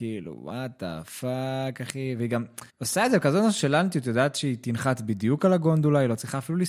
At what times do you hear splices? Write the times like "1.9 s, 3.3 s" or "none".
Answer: 2.7 s